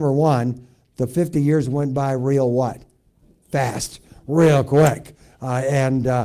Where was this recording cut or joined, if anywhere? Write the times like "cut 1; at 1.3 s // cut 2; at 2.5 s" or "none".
none